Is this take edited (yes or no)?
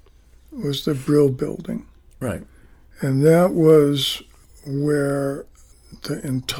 no